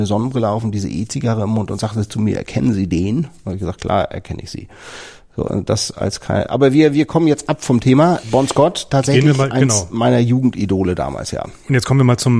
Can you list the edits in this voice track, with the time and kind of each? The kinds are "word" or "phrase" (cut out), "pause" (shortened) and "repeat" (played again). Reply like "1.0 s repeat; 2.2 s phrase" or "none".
none